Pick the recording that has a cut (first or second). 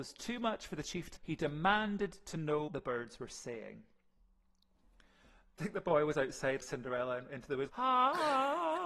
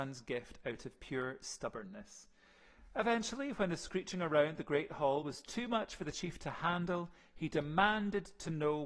first